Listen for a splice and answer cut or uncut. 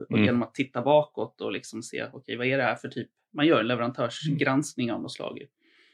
uncut